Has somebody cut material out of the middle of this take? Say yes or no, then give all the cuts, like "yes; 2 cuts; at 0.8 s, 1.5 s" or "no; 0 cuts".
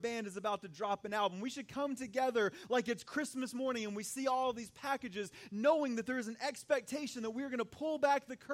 no; 0 cuts